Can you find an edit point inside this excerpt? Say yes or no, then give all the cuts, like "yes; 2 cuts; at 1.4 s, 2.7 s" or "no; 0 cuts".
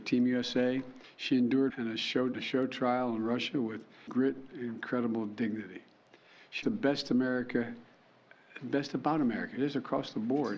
yes; 5 cuts; at 1.7 s, 2.3 s, 4.1 s, 4.5 s, 6.6 s